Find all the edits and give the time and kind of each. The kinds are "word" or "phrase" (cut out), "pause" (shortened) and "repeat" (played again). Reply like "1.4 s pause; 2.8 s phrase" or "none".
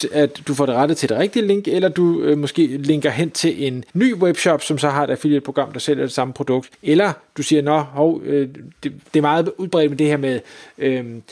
3.9 s pause; 6.7 s pause; 9.1 s pause